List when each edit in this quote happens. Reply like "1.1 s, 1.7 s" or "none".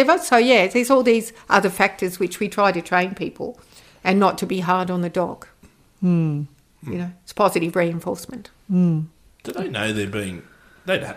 none